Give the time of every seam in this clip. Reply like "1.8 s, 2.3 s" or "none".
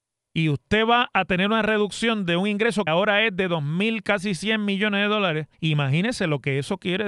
2.9 s, 5.5 s

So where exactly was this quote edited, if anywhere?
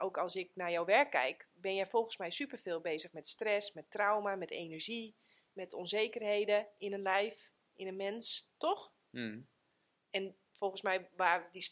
none

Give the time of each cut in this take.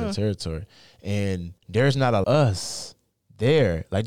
1.6 s, 2.2 s

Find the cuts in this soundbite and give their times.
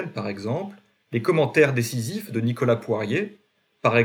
none

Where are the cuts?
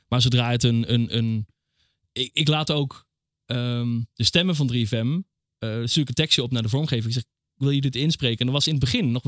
none

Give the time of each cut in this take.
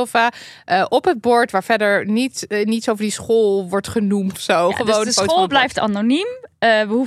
4.3 s

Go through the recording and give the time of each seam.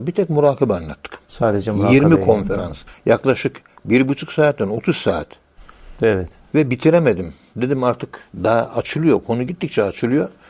2.9 s

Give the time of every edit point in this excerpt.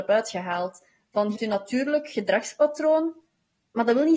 1.3 s

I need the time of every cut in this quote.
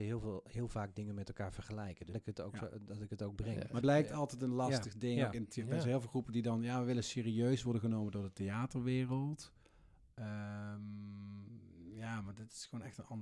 2.1 s, 3.8 s

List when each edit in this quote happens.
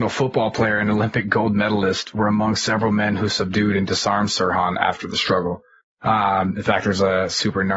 5.8 s

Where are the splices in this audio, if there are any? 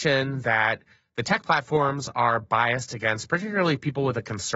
none

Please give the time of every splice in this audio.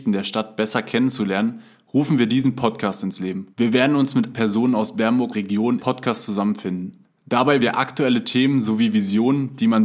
3.5 s, 4.3 s, 5.3 s, 5.8 s, 7.6 s

